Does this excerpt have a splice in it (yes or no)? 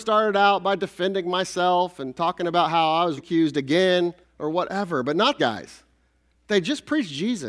yes